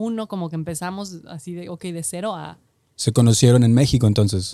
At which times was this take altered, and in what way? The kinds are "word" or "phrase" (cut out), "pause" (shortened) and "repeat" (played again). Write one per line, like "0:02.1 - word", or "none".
none